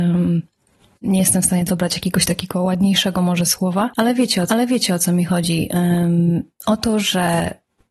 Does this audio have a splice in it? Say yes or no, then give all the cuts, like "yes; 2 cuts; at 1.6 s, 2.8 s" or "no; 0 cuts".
yes; 2 cuts; at 1.7 s, 4.5 s